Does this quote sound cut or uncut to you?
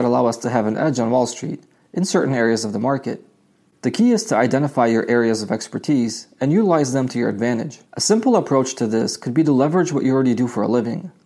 cut